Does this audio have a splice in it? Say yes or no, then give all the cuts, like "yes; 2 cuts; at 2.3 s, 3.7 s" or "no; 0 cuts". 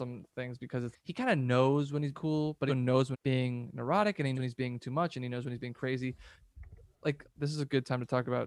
yes; 6 cuts; at 0.9 s, 2.1 s, 2.7 s, 3.1 s, 4.3 s, 7.2 s